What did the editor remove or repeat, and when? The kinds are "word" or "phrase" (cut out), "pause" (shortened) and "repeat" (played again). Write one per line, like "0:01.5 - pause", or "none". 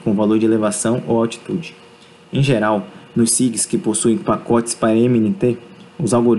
none